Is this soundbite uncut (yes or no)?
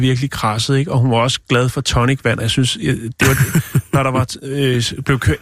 yes